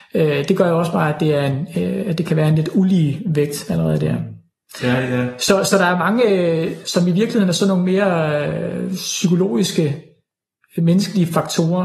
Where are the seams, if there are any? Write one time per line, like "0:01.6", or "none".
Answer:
none